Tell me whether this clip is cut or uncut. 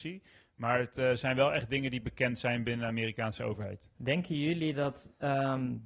cut